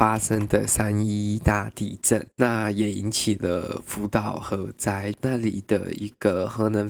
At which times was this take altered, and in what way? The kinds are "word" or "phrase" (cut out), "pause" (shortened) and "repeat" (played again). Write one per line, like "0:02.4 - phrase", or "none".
0:02.3 - pause